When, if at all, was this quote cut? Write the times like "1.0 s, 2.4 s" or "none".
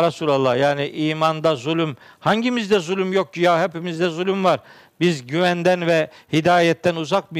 none